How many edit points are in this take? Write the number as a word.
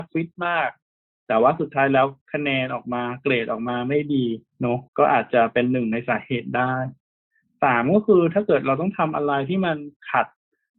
two